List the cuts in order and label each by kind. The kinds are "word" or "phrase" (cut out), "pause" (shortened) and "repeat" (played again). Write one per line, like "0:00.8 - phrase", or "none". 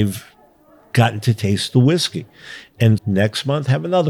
0:03.0 - word